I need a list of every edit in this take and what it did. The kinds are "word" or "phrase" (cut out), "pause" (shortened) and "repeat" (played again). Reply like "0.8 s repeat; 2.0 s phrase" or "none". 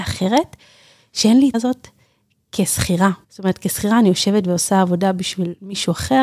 1.5 s word; 3.2 s pause